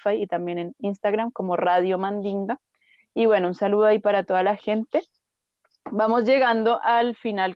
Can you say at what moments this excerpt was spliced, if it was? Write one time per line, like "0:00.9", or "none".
none